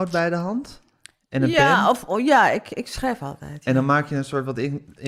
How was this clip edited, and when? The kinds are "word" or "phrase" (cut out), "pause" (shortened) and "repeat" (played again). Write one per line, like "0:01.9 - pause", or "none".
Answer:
none